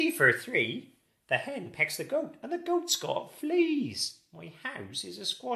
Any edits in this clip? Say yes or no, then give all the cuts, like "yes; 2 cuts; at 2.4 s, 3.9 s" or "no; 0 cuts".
no; 0 cuts